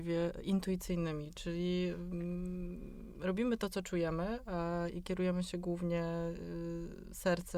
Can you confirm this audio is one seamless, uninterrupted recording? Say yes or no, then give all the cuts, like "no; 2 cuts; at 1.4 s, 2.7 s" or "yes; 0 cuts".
yes; 0 cuts